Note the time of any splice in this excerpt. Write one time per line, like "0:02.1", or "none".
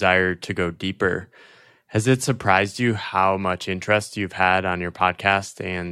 none

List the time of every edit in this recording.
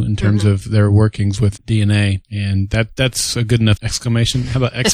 0:01.6
0:02.2
0:03.8

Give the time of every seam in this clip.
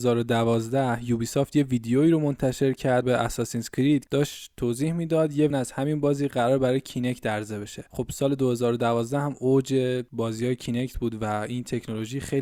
0:03.0
0:04.1
0:05.5

